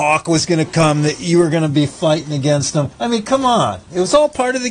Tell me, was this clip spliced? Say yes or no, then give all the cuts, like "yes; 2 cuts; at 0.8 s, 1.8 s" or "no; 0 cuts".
yes; 1 cut; at 2.9 s